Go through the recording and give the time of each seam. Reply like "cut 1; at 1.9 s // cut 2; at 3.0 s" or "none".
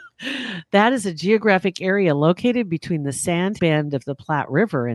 cut 1; at 3.6 s